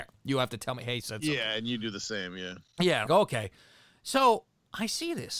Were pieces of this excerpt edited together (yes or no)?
yes